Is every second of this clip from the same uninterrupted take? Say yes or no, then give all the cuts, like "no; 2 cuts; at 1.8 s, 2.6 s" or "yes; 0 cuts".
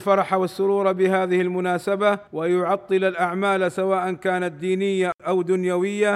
no; 2 cuts; at 2.3 s, 5.2 s